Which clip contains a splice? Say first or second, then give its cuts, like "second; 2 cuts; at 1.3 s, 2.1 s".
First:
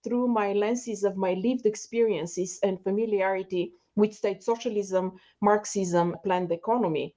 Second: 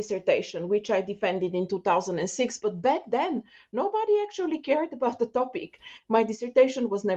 first; 1 cut; at 6.1 s